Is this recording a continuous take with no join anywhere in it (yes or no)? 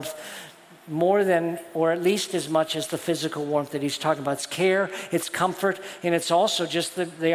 yes